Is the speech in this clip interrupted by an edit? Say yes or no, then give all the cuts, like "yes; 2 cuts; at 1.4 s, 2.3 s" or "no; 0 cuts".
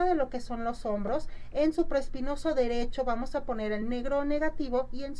no; 0 cuts